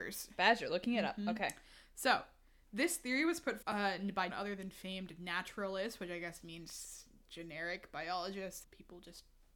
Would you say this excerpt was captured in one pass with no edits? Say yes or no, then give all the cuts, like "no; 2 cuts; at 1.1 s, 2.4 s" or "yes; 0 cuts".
no; 4 cuts; at 3.6 s, 4.3 s, 6.4 s, 8.6 s